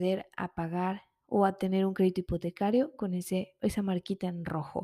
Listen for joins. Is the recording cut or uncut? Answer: uncut